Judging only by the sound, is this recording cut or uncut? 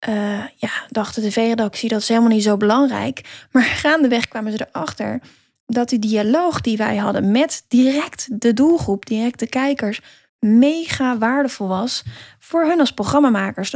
uncut